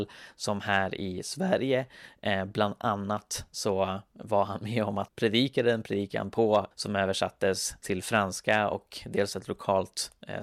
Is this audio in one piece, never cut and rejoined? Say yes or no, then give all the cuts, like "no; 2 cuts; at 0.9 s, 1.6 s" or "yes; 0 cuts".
no; 3 cuts; at 5.1 s, 6.7 s, 7.8 s